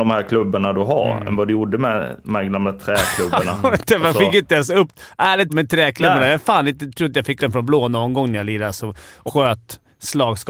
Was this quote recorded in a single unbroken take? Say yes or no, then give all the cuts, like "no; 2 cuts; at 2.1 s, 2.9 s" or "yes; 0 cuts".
no; 3 cuts; at 5.5 s, 7.4 s, 9.3 s